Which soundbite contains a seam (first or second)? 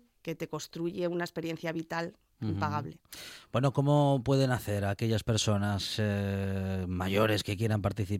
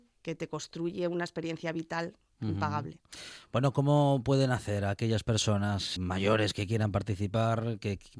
second